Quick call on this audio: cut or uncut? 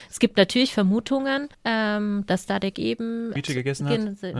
cut